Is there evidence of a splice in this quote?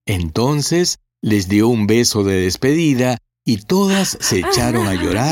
no; 0 cuts

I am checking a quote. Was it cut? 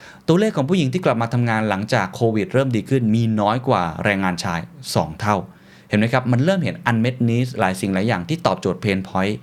no; 0 cuts

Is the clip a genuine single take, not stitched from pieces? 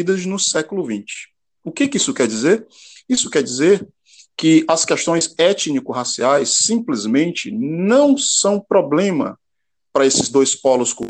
yes; 0 cuts

